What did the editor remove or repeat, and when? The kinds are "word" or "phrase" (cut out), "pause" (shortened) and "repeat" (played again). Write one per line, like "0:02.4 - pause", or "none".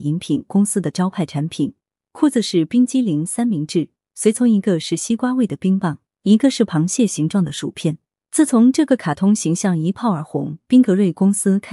none